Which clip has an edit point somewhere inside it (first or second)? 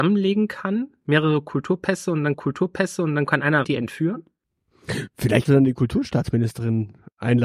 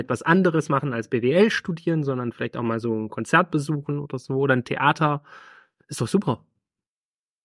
first